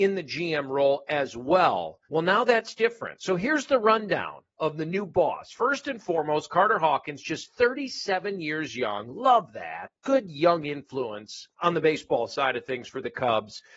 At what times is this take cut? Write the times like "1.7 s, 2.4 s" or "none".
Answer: 2.0 s, 4.5 s, 10.0 s, 11.5 s